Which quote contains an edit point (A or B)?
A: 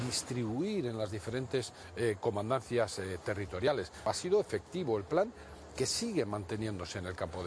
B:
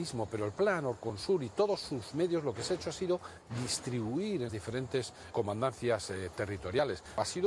B